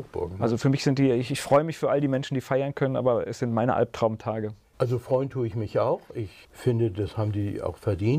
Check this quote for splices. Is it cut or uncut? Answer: uncut